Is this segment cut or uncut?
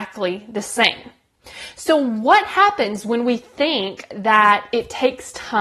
uncut